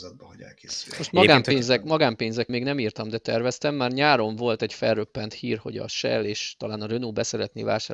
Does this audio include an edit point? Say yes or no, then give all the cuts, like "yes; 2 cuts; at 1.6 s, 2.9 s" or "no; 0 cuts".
yes; 1 cut; at 2.5 s